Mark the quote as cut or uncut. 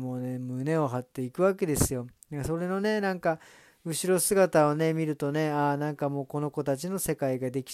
uncut